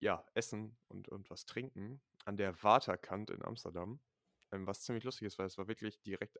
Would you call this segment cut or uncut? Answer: uncut